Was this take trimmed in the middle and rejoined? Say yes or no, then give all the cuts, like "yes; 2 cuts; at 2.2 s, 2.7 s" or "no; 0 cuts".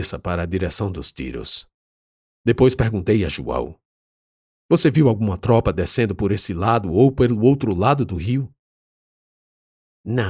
no; 0 cuts